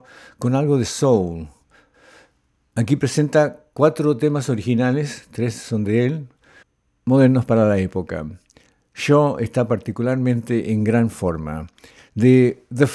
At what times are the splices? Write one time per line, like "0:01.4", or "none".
none